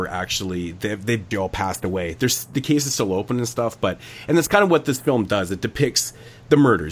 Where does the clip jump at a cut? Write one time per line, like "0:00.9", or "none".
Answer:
0:01.3